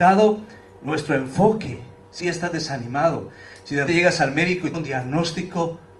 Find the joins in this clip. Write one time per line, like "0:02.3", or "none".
0:02.2
0:03.9
0:04.7